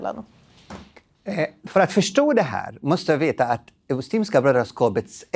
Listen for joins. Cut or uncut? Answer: uncut